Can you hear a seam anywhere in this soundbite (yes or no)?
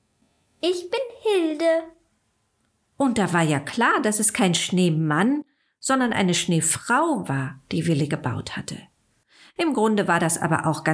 no